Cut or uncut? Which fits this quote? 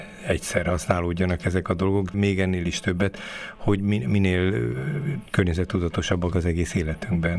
cut